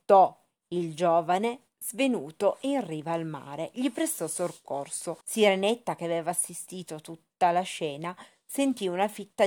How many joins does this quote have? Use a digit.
1